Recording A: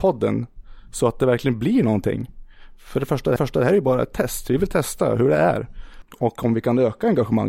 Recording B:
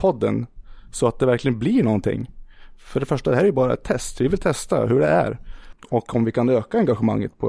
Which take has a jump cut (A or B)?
A